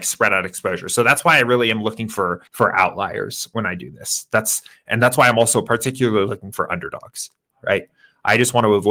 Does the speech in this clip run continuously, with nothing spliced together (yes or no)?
no